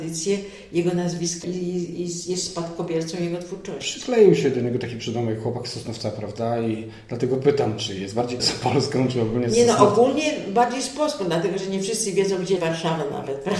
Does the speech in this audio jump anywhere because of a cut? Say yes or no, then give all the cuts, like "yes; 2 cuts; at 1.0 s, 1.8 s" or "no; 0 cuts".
yes; 3 cuts; at 1.4 s, 8.4 s, 12.6 s